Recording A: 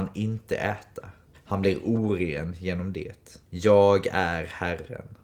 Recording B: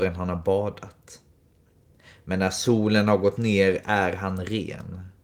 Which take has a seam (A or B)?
A